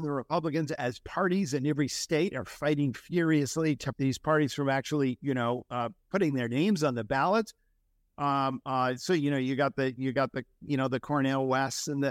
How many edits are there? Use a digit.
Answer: 2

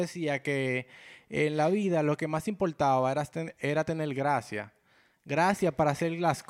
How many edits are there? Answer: 0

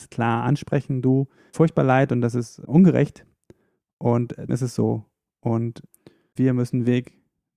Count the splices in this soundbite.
3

